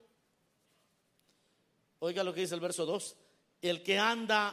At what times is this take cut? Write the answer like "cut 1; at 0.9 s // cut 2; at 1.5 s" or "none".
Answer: none